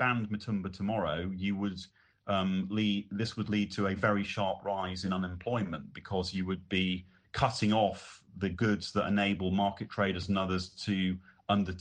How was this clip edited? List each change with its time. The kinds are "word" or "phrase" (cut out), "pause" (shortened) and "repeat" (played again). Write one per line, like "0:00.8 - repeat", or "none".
none